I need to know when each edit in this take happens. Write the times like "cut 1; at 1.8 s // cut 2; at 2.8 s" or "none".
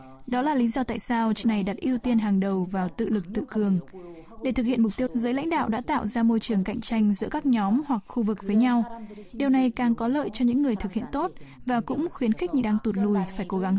cut 1; at 1.4 s // cut 2; at 5.1 s // cut 3; at 12.6 s